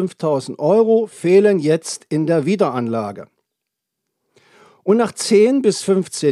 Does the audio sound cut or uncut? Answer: uncut